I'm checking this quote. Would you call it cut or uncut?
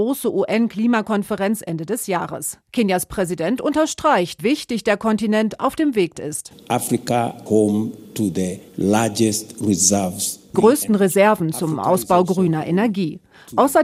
cut